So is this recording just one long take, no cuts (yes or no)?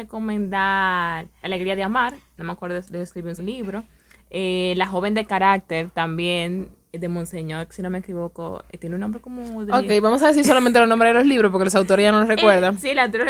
no